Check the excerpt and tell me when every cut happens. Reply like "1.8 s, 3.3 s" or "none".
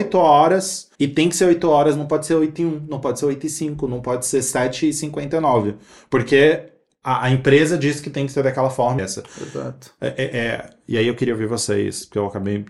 0.9 s, 9.0 s